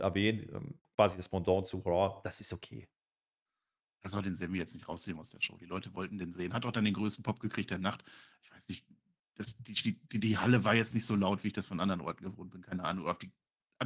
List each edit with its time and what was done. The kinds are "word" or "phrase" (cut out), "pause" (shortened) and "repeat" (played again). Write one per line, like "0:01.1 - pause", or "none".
none